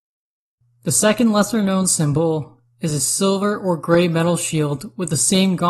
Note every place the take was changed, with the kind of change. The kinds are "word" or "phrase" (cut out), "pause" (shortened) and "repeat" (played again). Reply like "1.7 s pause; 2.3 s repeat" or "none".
none